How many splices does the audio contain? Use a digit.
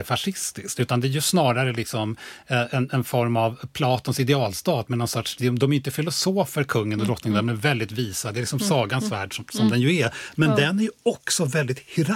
0